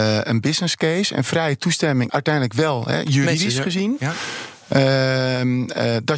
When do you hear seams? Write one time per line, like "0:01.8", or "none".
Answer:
0:02.1

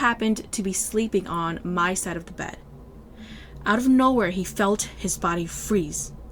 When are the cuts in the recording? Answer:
none

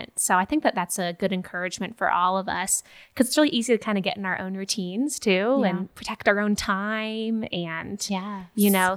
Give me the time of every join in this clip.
none

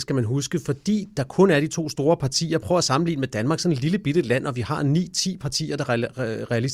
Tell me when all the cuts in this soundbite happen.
none

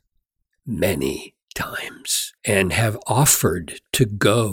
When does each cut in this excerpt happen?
0:02.4

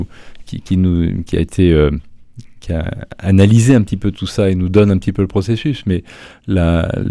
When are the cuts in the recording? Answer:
0:04.1

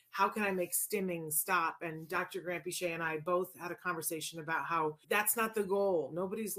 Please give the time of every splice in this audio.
0:05.0

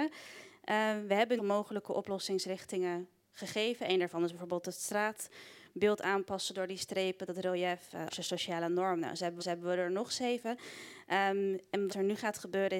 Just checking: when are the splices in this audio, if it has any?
0:01.4
0:08.1
0:09.4
0:11.9

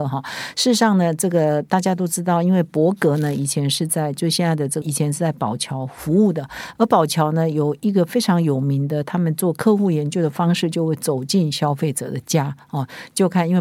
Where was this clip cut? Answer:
0:04.8

